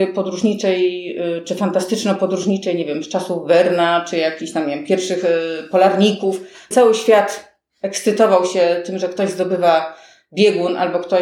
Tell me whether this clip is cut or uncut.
cut